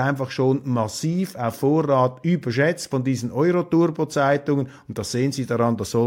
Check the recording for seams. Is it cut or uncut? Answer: uncut